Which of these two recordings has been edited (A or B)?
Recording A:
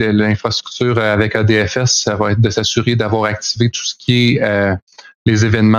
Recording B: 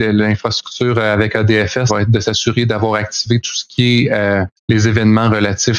B